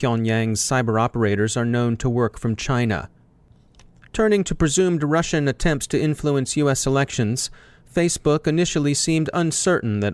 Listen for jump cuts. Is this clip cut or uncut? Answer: uncut